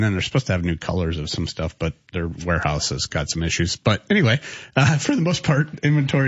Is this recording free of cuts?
yes; 0 cuts

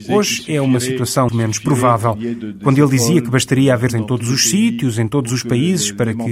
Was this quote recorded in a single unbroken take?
no; 2 cuts; at 1.3 s, 3.9 s

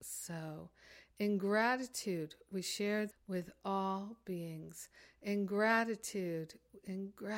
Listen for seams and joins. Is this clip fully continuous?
no; 1 cut; at 3.1 s

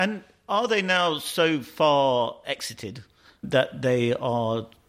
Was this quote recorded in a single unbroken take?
yes; 0 cuts

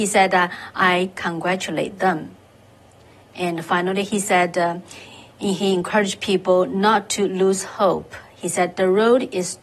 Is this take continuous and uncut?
yes; 0 cuts

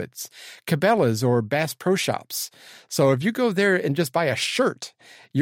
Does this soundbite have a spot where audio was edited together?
no; 0 cuts

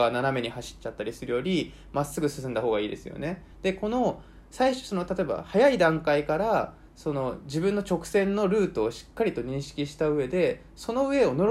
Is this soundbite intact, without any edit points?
no; 1 cut; at 3.5 s

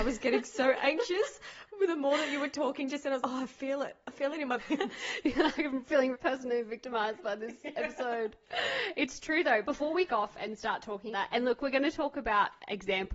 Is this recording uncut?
no; 6 cuts; at 3.2 s, 4.6 s, 6.1 s, 9.6 s, 10.1 s, 11.1 s

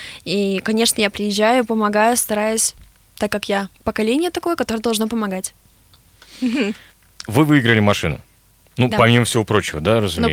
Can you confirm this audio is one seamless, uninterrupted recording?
no; 1 cut; at 3.7 s

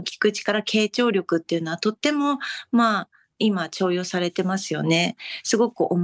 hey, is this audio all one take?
yes; 0 cuts

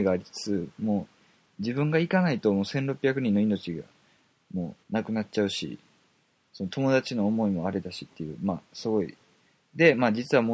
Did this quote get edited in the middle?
yes; 1 cut; at 4.8 s

